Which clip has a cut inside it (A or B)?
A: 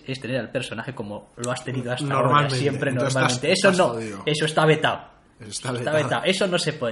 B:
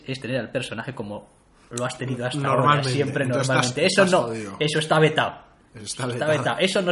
A